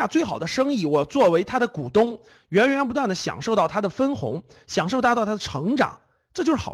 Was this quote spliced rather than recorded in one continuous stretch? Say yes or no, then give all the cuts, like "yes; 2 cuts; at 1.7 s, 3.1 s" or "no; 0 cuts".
no; 0 cuts